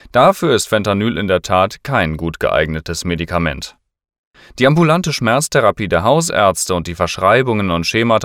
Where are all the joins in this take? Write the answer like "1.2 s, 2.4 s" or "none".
none